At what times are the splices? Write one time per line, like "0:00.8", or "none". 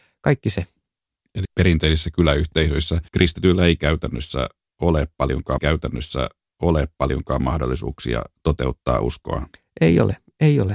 0:01.4
0:03.1
0:05.6
0:09.5